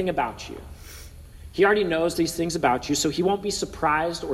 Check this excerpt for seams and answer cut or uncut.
uncut